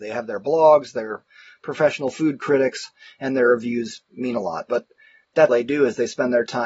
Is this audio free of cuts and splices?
no; 1 cut; at 5.5 s

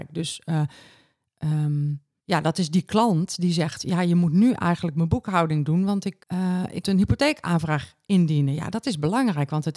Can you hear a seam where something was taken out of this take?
yes; 3 cuts; at 2.2 s, 6.2 s, 6.8 s

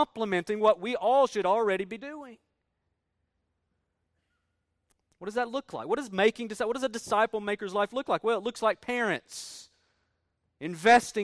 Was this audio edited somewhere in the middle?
no; 0 cuts

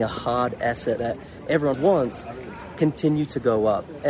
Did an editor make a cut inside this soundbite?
yes; 2 cuts; at 1.0 s, 1.7 s

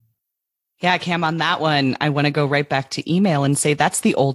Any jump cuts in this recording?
no; 0 cuts

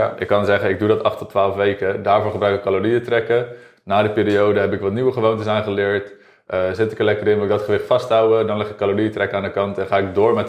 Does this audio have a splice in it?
no; 0 cuts

